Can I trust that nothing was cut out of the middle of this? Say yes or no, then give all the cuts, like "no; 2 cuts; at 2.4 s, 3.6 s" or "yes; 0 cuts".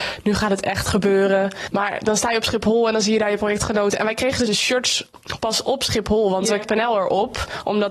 no; 2 cuts; at 4.5 s, 6.6 s